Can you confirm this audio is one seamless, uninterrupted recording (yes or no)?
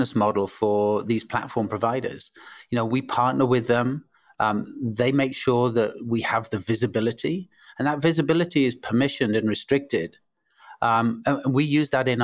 yes